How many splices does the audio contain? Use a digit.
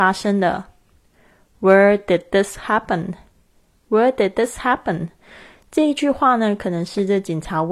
0